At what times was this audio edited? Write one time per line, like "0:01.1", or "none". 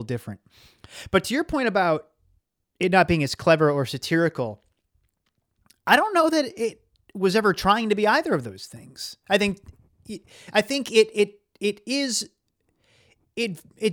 none

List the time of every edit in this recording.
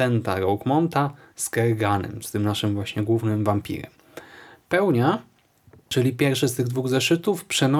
none

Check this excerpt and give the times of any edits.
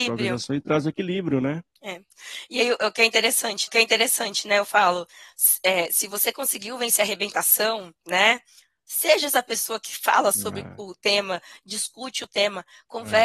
0:01.7
0:03.7
0:08.0

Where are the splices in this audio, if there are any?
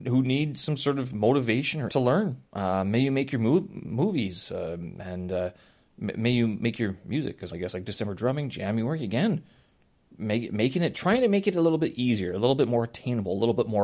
0:01.9
0:02.5
0:07.5

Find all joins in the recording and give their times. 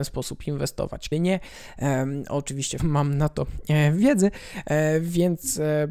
0:01.1
0:02.8

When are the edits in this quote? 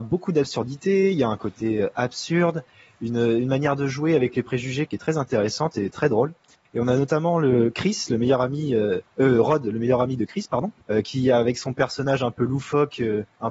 none

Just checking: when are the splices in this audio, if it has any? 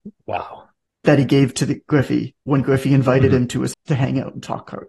0:03.7

